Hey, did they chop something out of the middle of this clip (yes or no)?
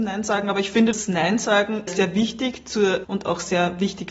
yes